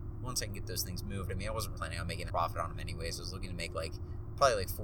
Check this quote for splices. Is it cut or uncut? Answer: cut